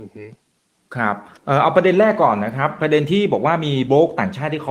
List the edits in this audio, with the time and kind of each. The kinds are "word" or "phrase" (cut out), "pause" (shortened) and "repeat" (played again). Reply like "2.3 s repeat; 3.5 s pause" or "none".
1.4 s pause